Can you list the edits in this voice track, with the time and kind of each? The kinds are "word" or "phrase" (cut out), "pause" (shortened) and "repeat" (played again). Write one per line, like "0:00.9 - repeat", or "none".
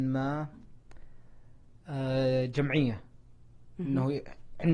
none

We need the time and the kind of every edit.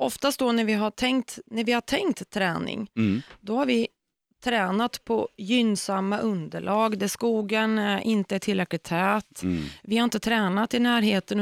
none

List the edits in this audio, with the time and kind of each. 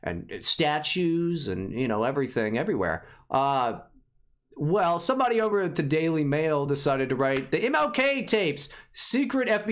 none

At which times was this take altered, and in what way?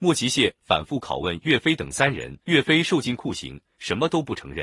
0:02.4 - pause

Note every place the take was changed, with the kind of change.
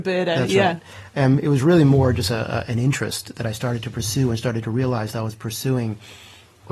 none

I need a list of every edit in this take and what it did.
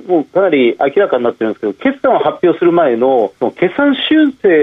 0:03.4 - pause

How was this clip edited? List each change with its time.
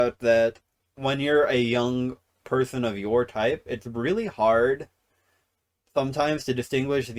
none

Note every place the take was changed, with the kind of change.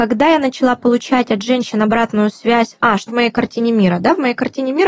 0:03.1 - word

